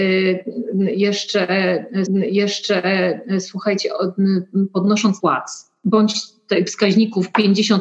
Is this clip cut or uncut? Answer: cut